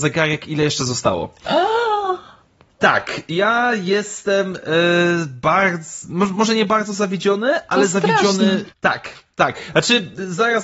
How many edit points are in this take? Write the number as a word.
one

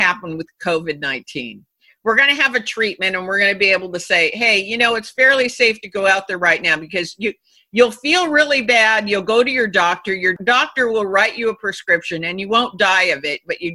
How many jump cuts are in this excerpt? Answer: zero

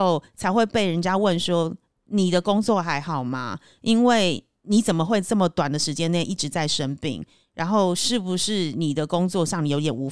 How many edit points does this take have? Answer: zero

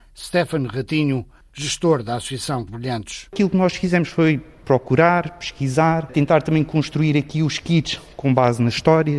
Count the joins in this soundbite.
one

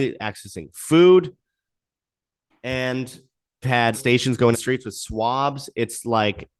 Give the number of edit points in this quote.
three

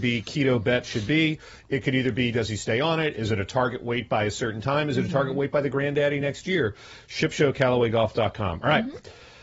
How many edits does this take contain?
zero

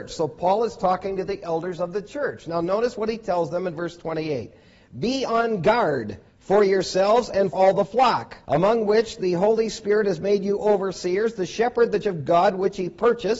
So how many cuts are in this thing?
four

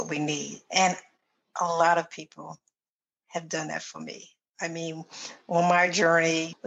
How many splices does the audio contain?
zero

